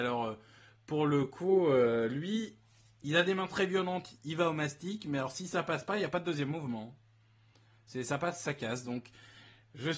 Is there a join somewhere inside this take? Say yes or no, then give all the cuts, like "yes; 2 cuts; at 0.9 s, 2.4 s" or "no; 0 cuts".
no; 0 cuts